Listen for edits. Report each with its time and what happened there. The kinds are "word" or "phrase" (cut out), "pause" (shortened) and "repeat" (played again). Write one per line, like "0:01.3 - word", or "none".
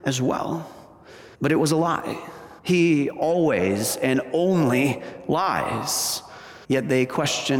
0:01.3 - pause
0:02.6 - pause
0:06.6 - pause